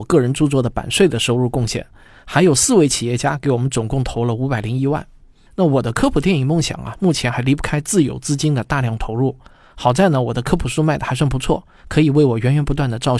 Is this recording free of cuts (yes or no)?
yes